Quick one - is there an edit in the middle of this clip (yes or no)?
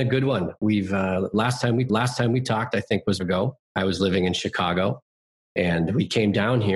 yes